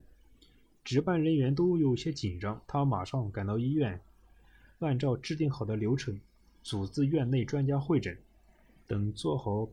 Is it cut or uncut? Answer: cut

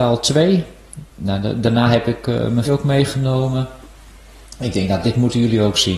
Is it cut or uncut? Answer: cut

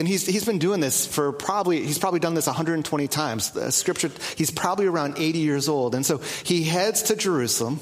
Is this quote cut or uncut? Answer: uncut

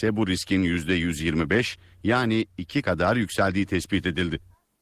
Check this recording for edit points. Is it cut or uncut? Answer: cut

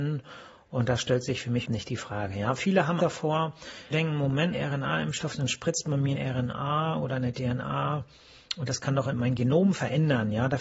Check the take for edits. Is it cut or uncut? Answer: cut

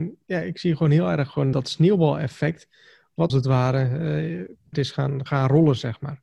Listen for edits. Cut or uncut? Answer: cut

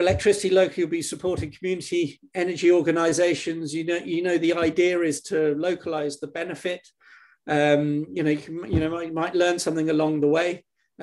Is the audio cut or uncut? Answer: uncut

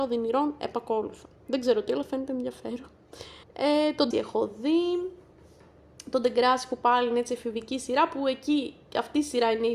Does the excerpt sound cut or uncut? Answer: cut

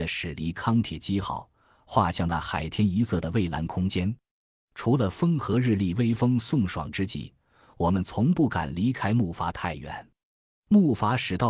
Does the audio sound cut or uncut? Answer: uncut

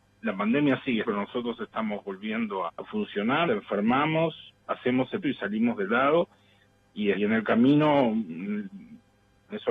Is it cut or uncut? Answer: cut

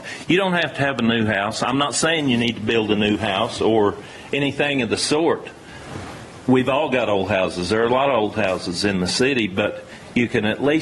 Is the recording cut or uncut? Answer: uncut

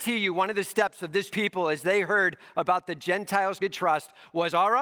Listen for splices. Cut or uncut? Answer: cut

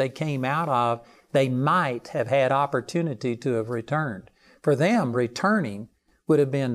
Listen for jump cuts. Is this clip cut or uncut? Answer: uncut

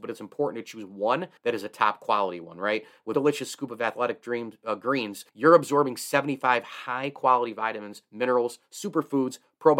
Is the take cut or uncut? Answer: cut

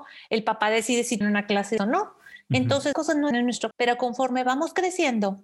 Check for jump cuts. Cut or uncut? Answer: cut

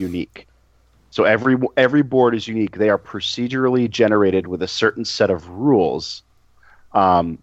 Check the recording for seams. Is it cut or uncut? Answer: uncut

